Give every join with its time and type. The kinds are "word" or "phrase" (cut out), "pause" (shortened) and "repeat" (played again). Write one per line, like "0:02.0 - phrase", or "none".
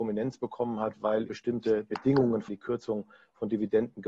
0:01.3 - word
0:02.5 - phrase